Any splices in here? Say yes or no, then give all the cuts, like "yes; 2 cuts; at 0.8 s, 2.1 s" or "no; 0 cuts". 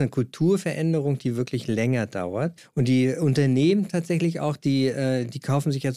yes; 1 cut; at 2.6 s